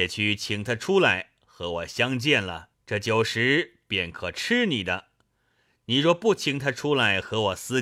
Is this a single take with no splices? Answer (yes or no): no